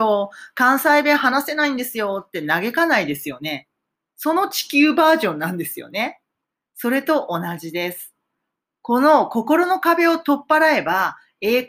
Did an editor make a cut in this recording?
no; 0 cuts

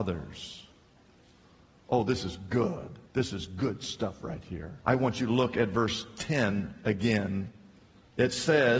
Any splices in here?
yes; 2 cuts; at 3.1 s, 4.8 s

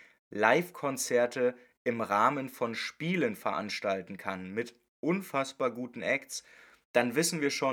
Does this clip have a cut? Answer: no; 0 cuts

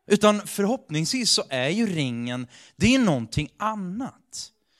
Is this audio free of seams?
yes; 0 cuts

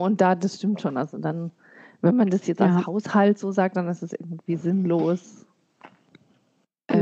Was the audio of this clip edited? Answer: no; 0 cuts

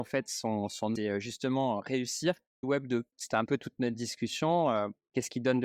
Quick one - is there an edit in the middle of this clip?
yes; 4 cuts; at 1.0 s, 2.6 s, 3.1 s, 3.5 s

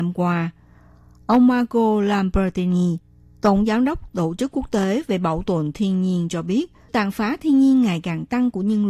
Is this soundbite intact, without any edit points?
no; 1 cut; at 6.9 s

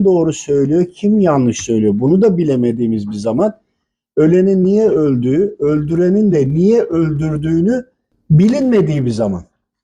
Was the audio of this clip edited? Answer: no; 0 cuts

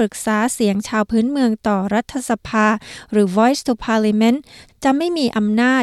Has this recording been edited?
no; 0 cuts

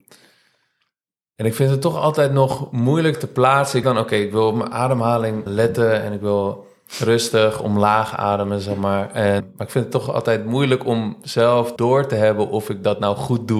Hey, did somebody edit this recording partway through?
yes; 4 cuts; at 3.8 s, 5.5 s, 9.4 s, 11.8 s

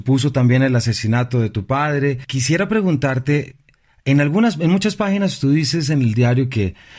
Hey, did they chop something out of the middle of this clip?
no; 0 cuts

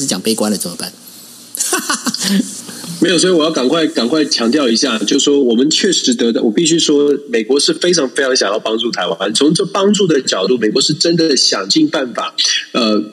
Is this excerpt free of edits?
yes; 0 cuts

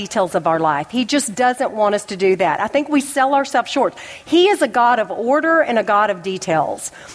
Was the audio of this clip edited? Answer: no; 0 cuts

